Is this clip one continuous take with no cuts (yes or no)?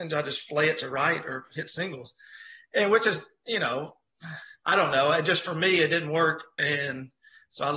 no